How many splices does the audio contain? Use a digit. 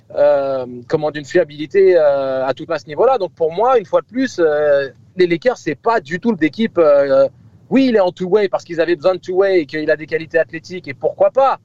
4